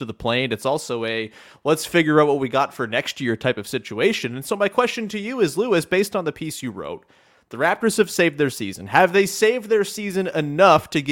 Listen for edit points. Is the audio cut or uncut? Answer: uncut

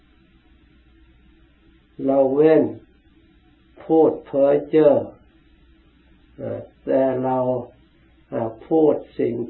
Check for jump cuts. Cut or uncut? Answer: uncut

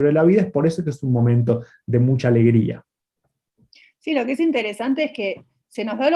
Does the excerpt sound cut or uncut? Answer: uncut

